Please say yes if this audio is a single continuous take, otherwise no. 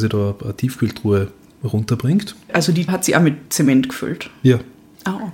no